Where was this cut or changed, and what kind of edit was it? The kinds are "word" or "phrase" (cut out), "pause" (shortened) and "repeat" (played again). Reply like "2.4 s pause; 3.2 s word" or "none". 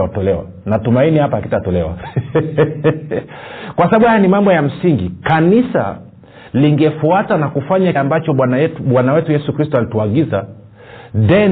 7.9 s word